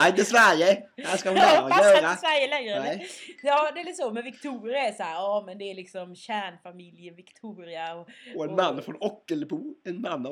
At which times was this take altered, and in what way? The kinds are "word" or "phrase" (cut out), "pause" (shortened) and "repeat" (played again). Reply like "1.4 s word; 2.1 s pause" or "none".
none